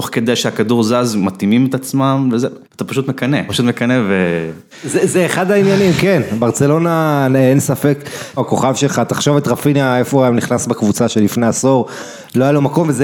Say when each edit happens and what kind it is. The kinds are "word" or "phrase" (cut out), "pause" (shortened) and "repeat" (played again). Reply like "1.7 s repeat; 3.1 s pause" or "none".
2.6 s pause; 3.5 s word; 4.7 s pause; 8.4 s phrase